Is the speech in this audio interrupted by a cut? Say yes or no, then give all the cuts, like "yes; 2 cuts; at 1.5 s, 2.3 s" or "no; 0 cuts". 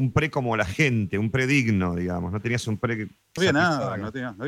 yes; 1 cut; at 3.4 s